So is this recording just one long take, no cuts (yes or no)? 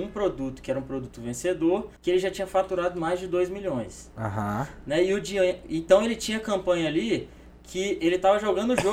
no